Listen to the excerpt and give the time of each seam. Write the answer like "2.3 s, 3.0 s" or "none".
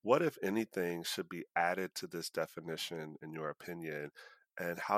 none